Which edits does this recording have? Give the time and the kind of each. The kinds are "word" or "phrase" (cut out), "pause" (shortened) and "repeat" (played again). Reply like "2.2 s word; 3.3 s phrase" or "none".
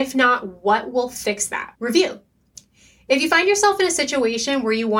1.7 s pause